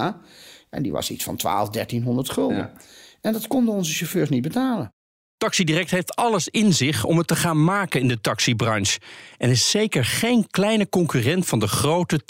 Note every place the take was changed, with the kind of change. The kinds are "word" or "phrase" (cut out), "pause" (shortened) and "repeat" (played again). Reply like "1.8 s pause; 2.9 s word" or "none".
none

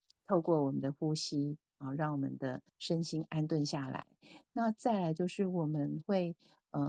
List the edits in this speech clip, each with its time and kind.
2.7 s pause

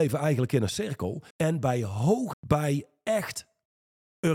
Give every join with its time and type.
1.3 s pause; 2.3 s word

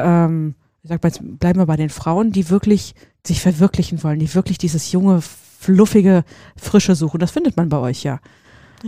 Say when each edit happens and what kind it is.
none

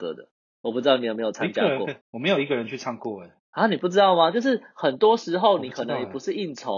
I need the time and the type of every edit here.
2.0 s pause

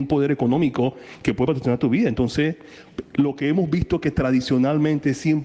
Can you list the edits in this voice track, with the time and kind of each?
none

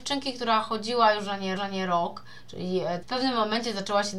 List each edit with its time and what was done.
1.6 s repeat; 3.0 s word

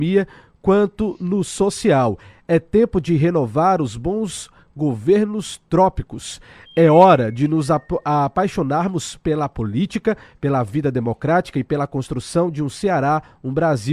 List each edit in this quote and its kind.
none

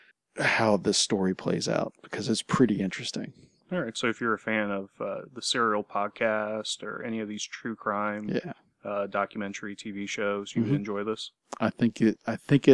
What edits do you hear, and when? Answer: none

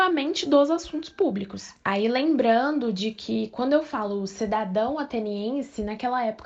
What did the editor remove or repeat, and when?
none

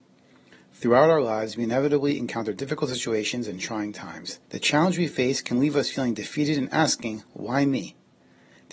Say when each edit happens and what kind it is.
4.4 s pause

